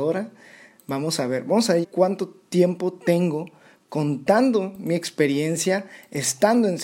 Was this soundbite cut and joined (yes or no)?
yes